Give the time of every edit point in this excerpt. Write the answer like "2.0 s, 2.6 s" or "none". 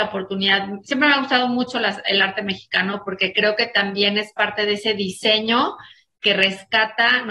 none